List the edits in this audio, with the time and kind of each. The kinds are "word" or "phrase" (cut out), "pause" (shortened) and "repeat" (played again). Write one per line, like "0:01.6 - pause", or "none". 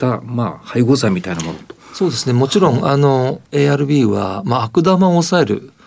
0:03.4 - pause